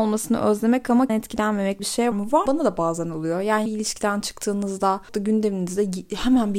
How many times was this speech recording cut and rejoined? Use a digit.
6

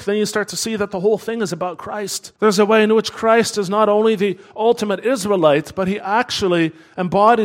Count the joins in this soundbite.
1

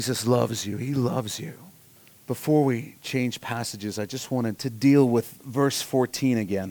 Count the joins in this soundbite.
2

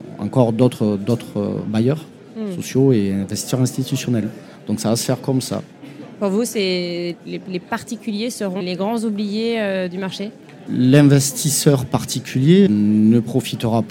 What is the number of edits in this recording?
4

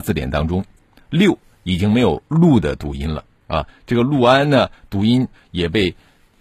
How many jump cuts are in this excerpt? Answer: 1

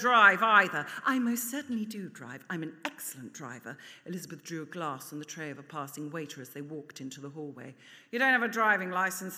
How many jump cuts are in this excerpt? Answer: 0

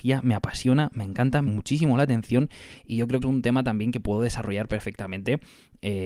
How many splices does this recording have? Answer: 2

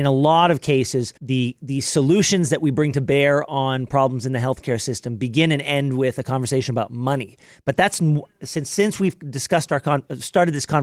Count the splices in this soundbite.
1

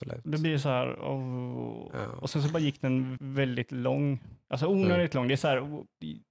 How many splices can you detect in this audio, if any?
1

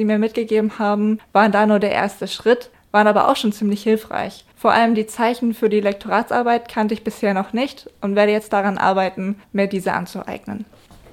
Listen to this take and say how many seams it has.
0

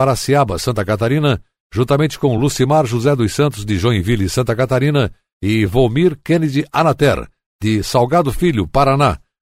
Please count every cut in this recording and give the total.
0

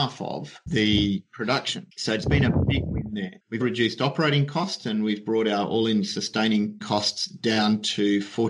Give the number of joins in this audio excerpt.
2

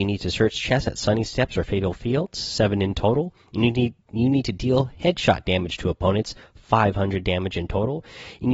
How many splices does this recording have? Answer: 0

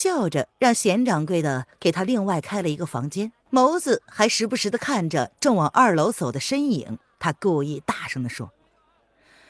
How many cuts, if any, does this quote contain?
1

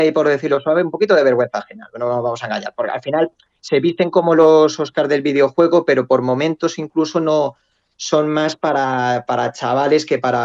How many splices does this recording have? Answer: 0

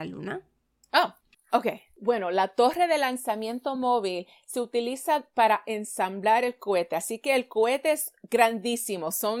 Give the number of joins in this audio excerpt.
0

